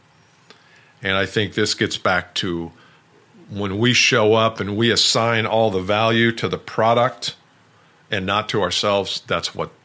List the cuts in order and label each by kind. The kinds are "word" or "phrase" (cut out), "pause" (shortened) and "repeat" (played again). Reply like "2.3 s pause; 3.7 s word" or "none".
none